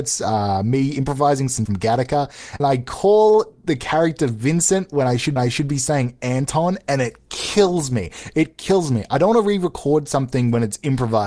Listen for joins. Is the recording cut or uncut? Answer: cut